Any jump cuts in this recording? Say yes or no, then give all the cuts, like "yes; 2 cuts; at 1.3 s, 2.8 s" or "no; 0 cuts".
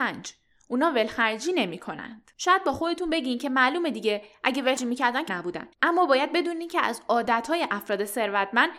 yes; 4 cuts; at 2.3 s, 4.8 s, 5.3 s, 5.7 s